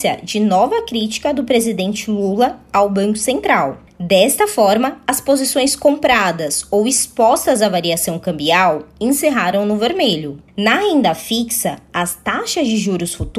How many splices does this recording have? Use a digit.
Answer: 1